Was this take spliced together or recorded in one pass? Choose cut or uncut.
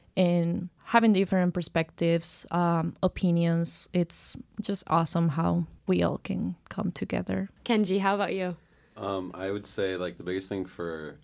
uncut